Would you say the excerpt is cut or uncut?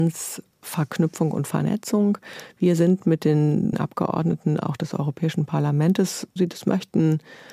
cut